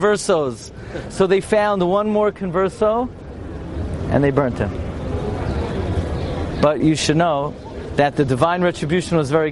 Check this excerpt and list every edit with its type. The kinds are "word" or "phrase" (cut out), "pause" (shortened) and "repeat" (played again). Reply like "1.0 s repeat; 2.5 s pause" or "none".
6.8 s word